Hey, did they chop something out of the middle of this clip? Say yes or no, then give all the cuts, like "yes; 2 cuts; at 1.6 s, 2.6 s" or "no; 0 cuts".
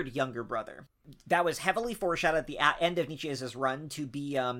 no; 0 cuts